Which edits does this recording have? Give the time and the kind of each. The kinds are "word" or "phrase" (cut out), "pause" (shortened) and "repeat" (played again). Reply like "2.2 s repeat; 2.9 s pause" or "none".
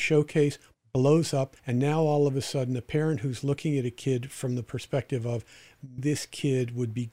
1.6 s pause; 6.0 s word